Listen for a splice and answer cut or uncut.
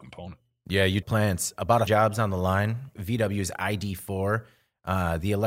cut